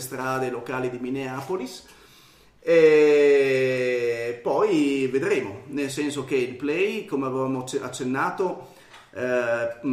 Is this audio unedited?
yes; 0 cuts

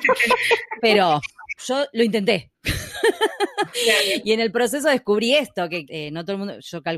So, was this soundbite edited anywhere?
yes; 2 cuts; at 1.6 s, 5.9 s

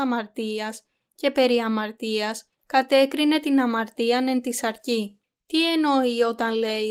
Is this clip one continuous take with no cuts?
no; 2 cuts; at 2.5 s, 5.2 s

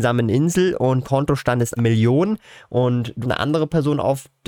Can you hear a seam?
yes; 3 cuts; at 1.0 s, 1.8 s, 3.2 s

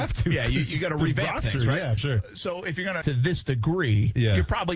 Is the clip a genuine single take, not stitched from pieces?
no; 2 cuts; at 2.0 s, 3.0 s

